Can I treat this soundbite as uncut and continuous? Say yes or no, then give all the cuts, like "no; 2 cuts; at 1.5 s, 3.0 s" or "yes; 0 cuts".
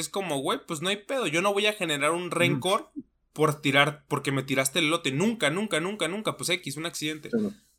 yes; 0 cuts